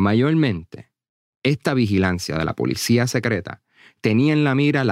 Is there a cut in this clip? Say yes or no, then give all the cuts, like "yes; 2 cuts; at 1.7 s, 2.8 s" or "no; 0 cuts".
no; 0 cuts